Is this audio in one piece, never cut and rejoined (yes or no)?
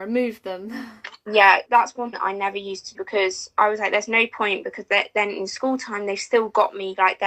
no